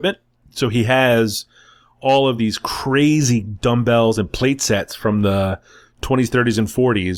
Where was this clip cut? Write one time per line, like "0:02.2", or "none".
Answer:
none